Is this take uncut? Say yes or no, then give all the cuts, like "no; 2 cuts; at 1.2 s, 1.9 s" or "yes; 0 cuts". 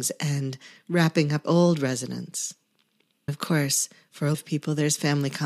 no; 3 cuts; at 1.4 s, 3.3 s, 4.3 s